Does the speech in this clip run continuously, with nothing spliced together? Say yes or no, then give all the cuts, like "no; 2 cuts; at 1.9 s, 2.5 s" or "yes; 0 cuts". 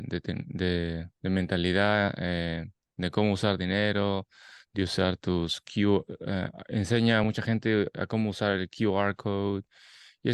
yes; 0 cuts